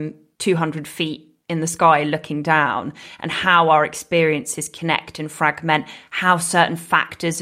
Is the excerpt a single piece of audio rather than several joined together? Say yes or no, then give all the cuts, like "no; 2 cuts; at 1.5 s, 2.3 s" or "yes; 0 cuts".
yes; 0 cuts